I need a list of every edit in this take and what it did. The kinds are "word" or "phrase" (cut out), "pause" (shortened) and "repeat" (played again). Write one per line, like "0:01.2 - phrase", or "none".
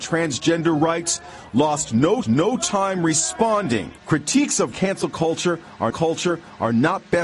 0:02.2 - repeat
0:04.0 - pause
0:04.7 - word
0:05.9 - repeat

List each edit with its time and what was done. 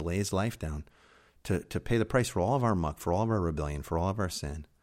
none

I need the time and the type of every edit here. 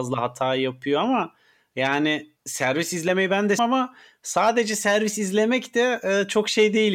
0:02.4 - pause
0:03.6 - word

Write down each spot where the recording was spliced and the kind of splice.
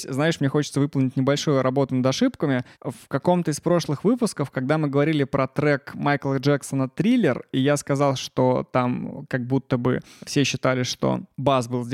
none

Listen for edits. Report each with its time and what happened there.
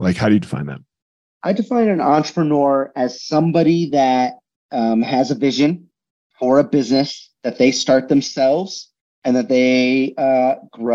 none

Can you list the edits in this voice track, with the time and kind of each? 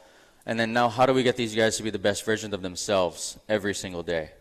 none

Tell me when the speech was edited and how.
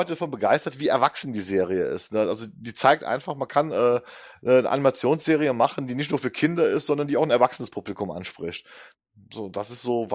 none

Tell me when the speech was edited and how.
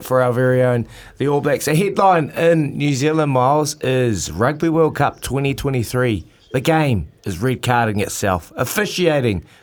none

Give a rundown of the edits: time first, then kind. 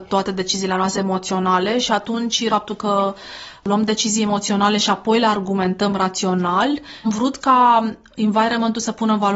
0:00.9 - word
0:02.5 - word
0:07.0 - word

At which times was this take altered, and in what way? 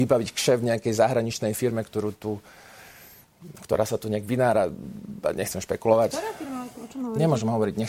none

